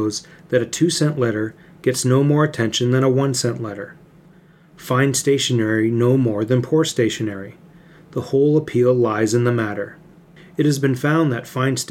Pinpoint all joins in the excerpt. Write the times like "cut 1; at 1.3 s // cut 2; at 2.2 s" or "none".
none